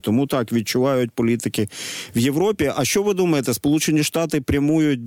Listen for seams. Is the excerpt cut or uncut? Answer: uncut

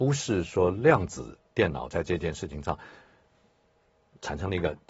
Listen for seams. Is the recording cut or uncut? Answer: uncut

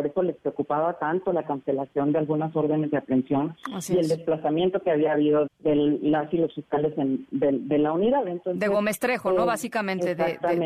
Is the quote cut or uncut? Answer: cut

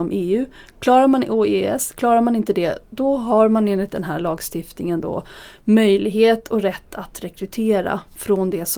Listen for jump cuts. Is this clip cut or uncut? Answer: uncut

